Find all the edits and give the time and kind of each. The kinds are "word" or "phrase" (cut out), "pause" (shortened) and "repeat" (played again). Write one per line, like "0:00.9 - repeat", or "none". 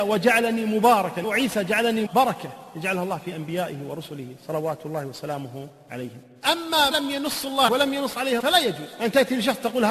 0:02.1 - word
0:06.9 - word
0:07.7 - word
0:08.4 - word